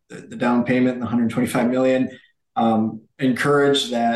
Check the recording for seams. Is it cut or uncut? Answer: uncut